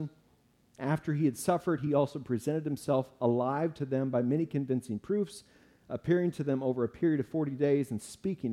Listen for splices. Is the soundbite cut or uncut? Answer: uncut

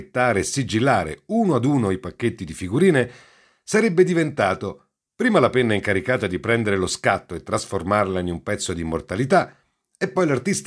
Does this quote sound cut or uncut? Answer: uncut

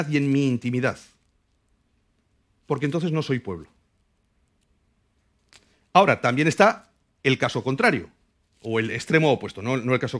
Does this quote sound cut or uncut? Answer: uncut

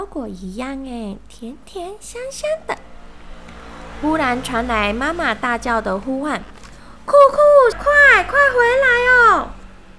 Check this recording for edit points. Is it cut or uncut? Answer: cut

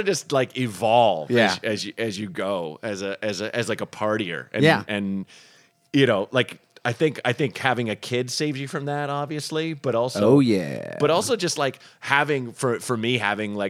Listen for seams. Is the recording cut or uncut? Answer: uncut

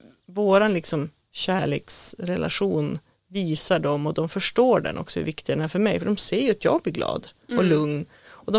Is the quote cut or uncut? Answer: uncut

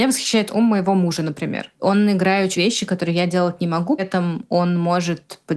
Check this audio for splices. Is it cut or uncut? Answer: cut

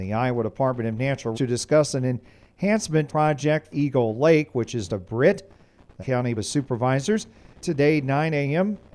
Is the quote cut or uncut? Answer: cut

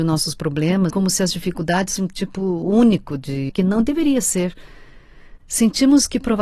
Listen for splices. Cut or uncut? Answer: cut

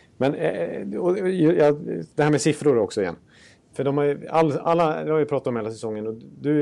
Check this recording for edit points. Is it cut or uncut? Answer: uncut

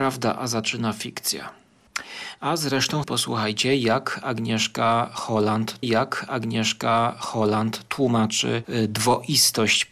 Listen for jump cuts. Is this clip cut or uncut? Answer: cut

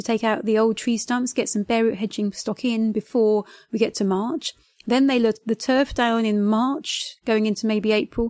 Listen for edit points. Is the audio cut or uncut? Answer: uncut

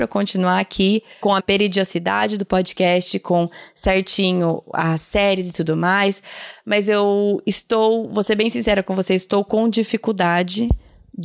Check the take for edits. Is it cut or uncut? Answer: cut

